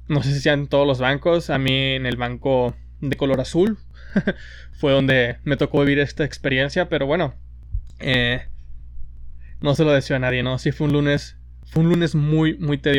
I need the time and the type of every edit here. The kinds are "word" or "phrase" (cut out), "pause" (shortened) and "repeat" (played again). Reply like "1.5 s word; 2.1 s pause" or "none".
none